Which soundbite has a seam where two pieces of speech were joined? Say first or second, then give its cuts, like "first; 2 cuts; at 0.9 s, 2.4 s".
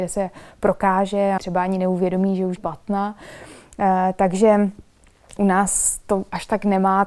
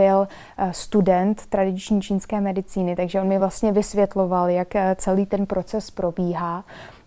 first; 3 cuts; at 1.4 s, 2.6 s, 5.4 s